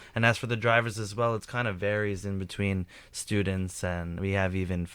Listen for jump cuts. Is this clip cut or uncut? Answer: uncut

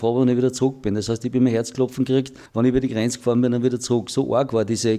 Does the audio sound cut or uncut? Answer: cut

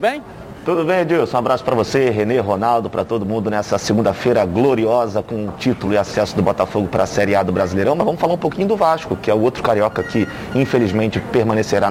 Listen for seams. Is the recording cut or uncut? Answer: uncut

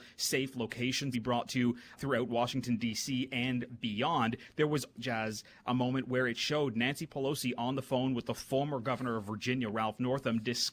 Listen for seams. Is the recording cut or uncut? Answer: cut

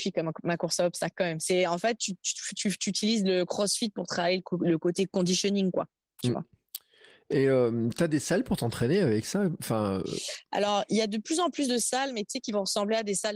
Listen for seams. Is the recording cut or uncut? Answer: uncut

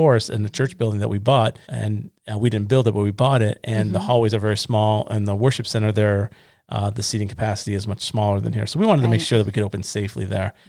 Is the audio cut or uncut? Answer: cut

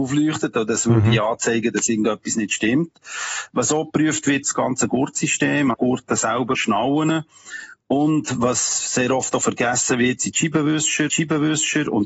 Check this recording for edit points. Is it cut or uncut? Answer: cut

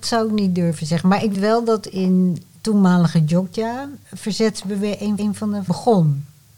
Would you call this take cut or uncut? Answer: cut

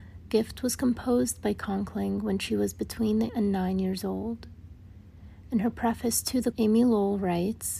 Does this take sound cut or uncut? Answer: cut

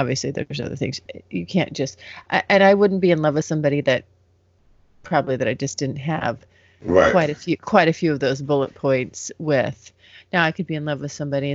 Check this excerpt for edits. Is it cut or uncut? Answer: uncut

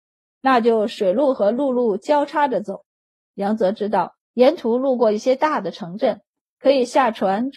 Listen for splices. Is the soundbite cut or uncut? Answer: cut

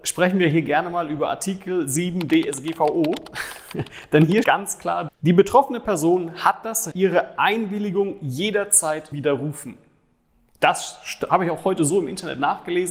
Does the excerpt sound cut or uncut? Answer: cut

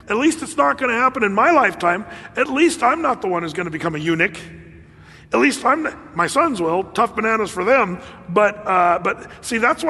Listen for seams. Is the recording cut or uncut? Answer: uncut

